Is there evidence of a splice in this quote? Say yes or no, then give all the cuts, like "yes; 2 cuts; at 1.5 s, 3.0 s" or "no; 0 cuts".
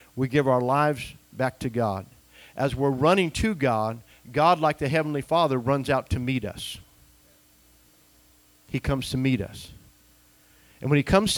no; 0 cuts